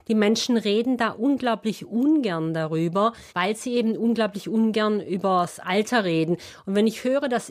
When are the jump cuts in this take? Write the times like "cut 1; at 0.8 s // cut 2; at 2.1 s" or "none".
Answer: cut 1; at 3.3 s